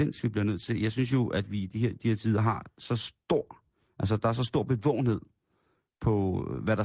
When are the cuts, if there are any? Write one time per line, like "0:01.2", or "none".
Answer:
none